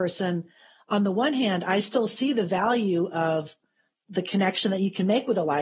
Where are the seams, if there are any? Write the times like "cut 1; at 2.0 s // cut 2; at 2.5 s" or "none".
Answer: none